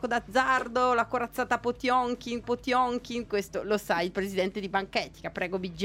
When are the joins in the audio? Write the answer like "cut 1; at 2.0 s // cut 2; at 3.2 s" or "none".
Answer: cut 1; at 2.4 s